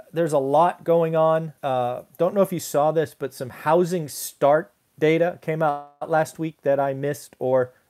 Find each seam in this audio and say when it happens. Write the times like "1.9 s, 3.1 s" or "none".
1.6 s